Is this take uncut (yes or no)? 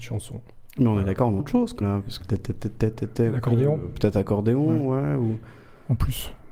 no